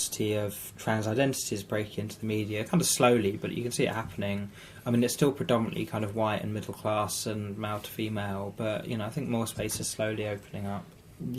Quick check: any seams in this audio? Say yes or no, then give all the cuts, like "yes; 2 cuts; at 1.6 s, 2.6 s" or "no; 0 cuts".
no; 0 cuts